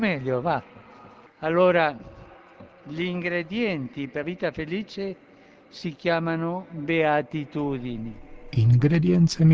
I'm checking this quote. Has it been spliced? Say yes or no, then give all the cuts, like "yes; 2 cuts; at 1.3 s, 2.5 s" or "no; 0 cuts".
yes; 1 cut; at 4.2 s